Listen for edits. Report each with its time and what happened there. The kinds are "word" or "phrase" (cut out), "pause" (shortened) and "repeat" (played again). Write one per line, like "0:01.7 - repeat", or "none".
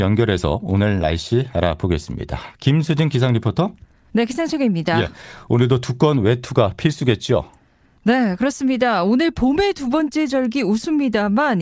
none